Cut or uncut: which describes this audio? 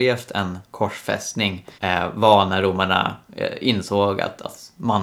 cut